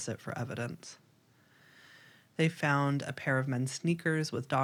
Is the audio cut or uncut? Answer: uncut